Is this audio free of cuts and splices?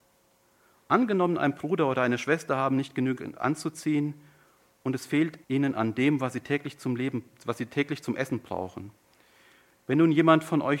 no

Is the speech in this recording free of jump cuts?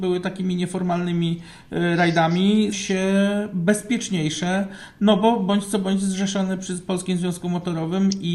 no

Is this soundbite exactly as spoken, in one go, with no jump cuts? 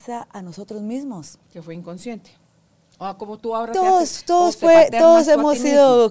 yes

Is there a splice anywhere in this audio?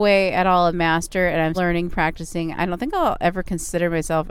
yes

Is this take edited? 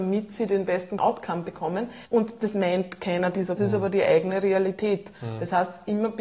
yes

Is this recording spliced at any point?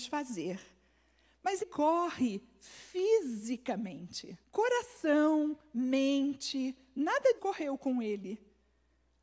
yes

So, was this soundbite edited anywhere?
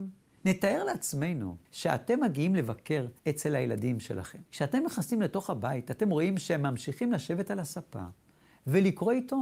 yes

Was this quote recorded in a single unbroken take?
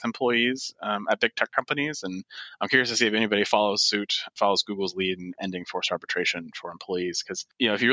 yes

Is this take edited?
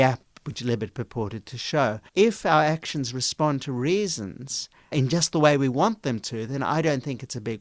yes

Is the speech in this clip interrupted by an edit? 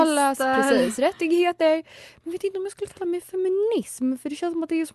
no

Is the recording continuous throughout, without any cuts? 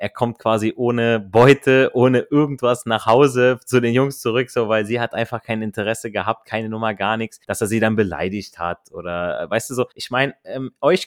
no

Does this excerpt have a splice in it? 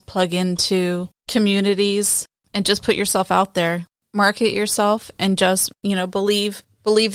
no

